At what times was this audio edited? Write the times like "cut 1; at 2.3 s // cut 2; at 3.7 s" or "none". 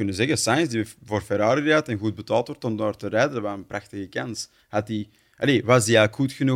none